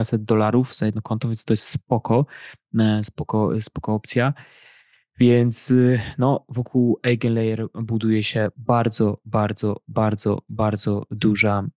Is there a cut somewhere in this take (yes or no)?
no